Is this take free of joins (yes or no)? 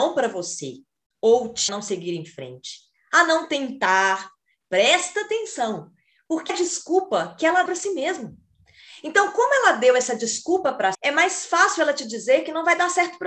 no